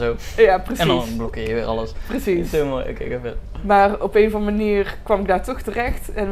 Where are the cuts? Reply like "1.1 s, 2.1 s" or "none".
none